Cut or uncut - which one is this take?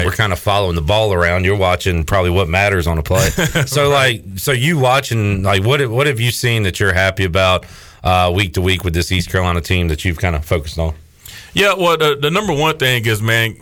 uncut